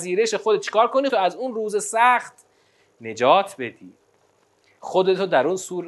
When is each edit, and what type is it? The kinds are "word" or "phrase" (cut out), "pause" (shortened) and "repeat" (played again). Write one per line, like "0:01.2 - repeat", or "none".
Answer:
0:01.1 - word